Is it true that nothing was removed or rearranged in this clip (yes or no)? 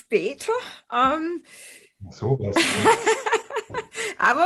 yes